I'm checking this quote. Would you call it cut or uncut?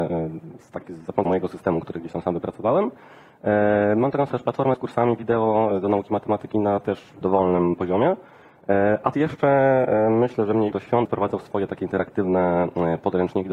cut